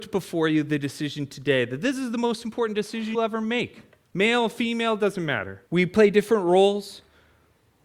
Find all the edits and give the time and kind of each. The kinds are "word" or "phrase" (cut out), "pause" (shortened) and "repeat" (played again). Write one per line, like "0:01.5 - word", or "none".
0:03.1 - word
0:05.7 - pause